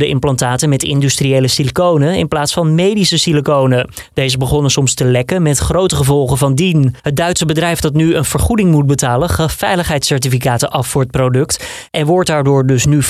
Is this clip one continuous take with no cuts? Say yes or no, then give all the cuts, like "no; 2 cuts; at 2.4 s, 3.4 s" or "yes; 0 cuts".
no; 1 cut; at 7.0 s